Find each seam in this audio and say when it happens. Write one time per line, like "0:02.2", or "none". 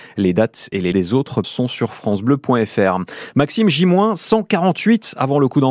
0:00.9
0:01.4